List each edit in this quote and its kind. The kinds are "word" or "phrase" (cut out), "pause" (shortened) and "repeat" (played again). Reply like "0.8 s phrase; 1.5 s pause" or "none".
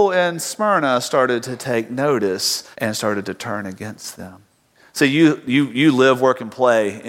2.7 s pause; 4.7 s pause